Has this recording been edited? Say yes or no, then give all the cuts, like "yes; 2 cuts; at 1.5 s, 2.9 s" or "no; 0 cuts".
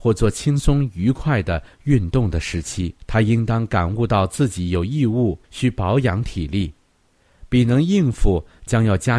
yes; 2 cuts; at 3.0 s, 5.4 s